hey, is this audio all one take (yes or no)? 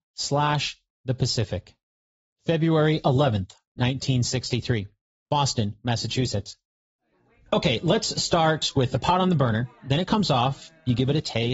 yes